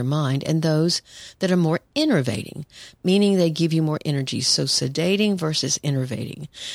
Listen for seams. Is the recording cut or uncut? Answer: uncut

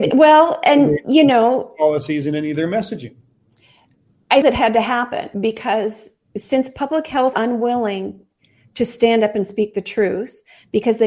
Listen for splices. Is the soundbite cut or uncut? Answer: cut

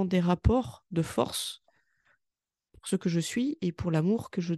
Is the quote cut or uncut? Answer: uncut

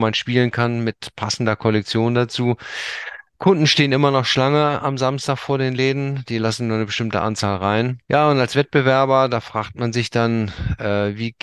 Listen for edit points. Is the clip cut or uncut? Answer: cut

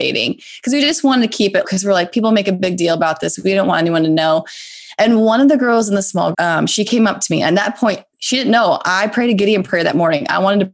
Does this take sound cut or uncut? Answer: cut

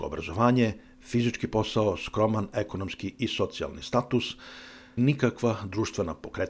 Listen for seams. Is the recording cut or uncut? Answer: cut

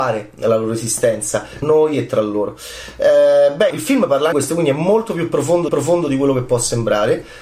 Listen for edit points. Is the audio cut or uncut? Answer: cut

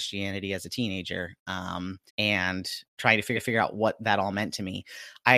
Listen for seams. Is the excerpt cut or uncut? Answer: cut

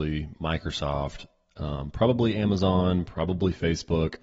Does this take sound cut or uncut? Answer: uncut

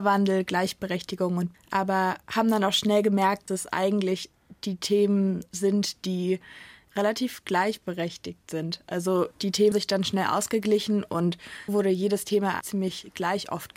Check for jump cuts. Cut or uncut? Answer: cut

